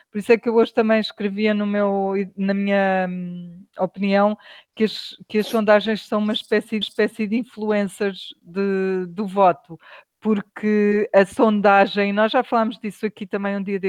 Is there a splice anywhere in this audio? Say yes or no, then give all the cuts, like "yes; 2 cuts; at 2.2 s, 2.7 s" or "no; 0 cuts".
yes; 1 cut; at 6.8 s